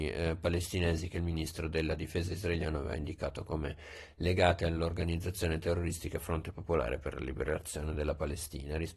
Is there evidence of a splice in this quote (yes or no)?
no